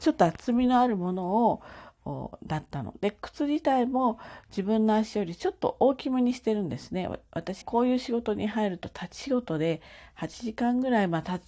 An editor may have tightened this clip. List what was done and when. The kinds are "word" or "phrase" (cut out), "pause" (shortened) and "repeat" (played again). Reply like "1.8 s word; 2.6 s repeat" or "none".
7.6 s phrase